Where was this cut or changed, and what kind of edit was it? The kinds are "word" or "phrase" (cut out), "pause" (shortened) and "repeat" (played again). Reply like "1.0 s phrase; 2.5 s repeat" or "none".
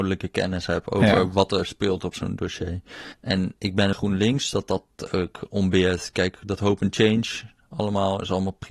3.1 s pause; 3.9 s phrase